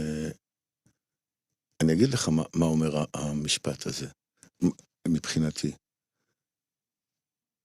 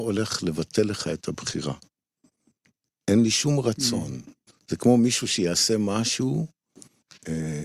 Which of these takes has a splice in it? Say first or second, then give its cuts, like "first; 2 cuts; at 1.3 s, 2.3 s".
second; 1 cut; at 4.5 s